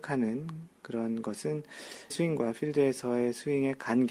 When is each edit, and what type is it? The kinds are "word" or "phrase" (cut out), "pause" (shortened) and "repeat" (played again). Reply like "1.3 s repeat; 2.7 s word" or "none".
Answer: 2.1 s word